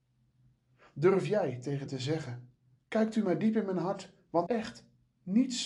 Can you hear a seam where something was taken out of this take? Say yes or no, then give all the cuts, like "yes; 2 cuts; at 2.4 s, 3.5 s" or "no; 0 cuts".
yes; 3 cuts; at 1.9 s, 2.8 s, 4.5 s